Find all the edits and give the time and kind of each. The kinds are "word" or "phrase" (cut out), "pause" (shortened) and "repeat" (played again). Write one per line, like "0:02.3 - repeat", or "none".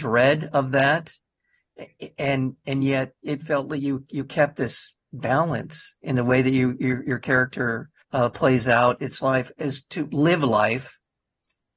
0:05.0 - pause
0:08.0 - pause